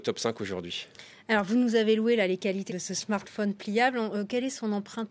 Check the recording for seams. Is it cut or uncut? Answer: cut